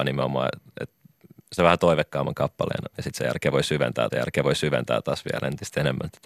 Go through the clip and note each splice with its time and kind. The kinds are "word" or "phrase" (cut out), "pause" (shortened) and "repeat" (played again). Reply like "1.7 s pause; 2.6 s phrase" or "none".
1.6 s word; 2.9 s pause; 4.1 s repeat